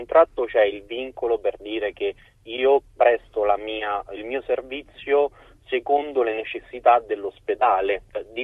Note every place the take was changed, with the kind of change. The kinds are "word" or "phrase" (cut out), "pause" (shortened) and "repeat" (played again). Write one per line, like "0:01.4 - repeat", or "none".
none